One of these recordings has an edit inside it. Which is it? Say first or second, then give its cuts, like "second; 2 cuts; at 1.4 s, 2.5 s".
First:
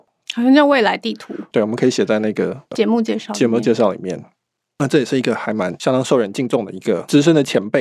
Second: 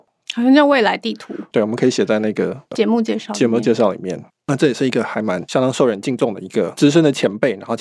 second; 1 cut; at 4.3 s